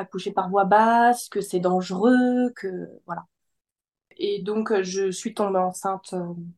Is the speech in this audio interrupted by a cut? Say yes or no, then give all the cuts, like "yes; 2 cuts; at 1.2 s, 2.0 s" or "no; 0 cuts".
no; 0 cuts